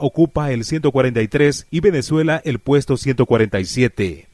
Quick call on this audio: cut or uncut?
cut